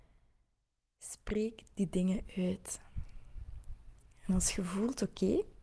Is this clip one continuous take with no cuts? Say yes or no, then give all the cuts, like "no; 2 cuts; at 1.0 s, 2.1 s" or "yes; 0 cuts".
yes; 0 cuts